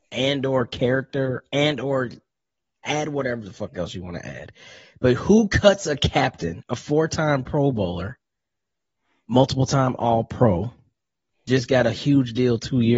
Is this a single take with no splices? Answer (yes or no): yes